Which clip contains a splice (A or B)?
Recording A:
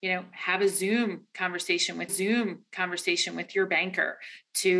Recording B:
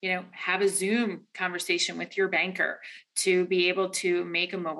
A